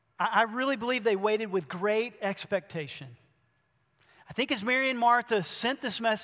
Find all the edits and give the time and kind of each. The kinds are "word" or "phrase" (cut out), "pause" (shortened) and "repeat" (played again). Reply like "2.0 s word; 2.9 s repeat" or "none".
none